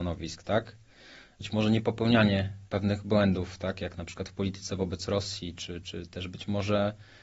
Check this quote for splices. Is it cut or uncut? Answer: cut